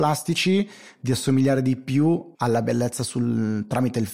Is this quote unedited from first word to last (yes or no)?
no